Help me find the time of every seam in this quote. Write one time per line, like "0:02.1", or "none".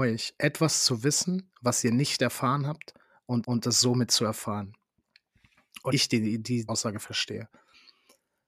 0:03.4
0:05.9
0:06.7